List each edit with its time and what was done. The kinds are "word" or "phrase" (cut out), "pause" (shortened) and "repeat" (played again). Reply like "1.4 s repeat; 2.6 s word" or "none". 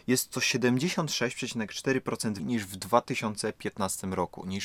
2.4 s word